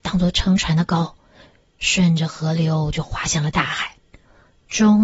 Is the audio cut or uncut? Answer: uncut